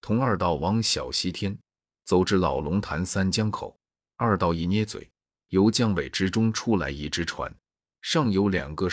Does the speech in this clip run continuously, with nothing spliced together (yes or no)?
yes